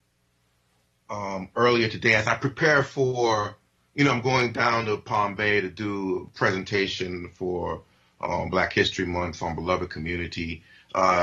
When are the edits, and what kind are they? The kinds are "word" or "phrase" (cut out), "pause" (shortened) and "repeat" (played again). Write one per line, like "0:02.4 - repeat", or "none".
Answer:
none